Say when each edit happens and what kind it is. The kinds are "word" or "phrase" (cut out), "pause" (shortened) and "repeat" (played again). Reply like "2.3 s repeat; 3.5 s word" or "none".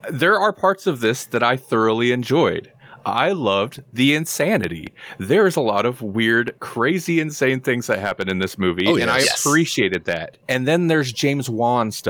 10.4 s pause